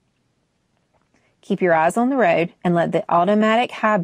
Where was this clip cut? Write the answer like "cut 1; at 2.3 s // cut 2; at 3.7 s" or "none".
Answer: cut 1; at 2.6 s